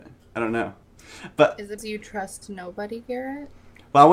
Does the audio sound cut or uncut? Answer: cut